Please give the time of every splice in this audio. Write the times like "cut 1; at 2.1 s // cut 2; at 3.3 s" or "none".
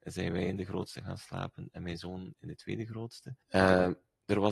cut 1; at 3.4 s

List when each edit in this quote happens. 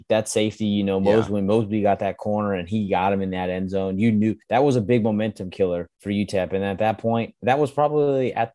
cut 1; at 4.4 s // cut 2; at 5.9 s

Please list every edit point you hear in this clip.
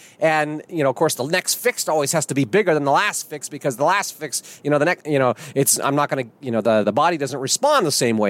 cut 1; at 6.8 s

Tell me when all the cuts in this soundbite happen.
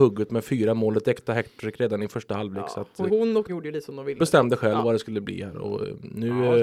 cut 1; at 3.1 s // cut 2; at 3.5 s // cut 3; at 4.2 s

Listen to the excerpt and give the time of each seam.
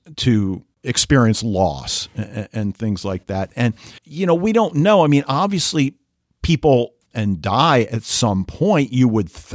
cut 1; at 4.0 s // cut 2; at 7.1 s

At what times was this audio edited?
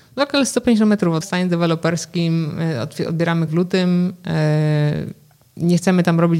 cut 1; at 1.2 s // cut 2; at 3.5 s

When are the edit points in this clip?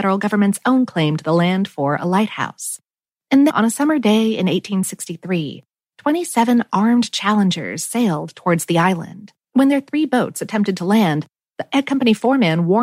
cut 1; at 3.5 s // cut 2; at 9.4 s

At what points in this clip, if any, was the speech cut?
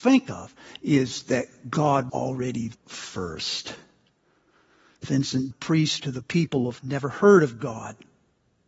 cut 1; at 2.1 s // cut 2; at 2.8 s // cut 3; at 5.5 s // cut 4; at 6.0 s // cut 5; at 6.8 s

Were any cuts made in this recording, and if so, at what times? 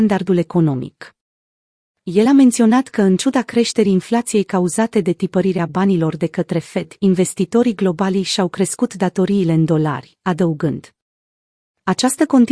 none

